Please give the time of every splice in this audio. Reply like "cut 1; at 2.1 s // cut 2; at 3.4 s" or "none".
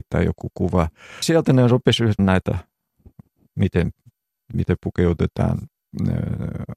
cut 1; at 1.2 s // cut 2; at 2.2 s // cut 3; at 4.5 s